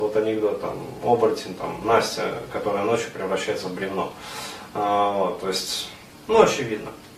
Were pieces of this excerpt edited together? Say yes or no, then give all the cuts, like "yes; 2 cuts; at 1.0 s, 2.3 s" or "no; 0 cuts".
no; 0 cuts